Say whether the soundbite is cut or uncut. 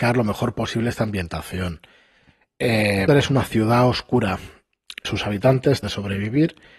cut